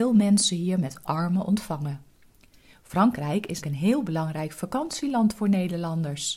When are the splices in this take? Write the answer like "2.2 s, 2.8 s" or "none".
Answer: 1.0 s, 3.6 s